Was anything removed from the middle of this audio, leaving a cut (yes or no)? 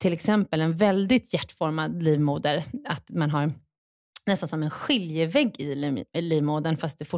no